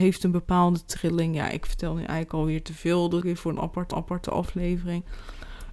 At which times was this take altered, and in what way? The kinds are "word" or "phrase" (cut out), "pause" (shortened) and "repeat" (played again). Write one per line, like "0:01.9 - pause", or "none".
0:03.2 - word
0:03.9 - repeat